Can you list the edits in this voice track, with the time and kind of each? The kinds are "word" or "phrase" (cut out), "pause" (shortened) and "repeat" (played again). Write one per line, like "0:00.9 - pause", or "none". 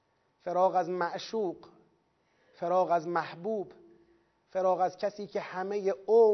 none